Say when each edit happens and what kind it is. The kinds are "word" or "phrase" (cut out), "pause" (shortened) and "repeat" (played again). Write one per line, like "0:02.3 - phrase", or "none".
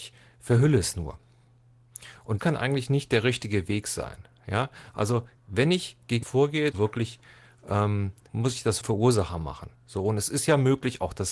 0:02.4 - word
0:05.4 - pause
0:06.2 - word
0:06.7 - phrase
0:08.3 - word
0:08.8 - phrase
0:09.7 - pause